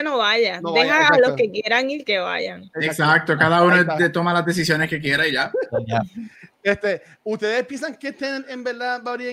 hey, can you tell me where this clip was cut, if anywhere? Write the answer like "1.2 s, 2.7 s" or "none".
none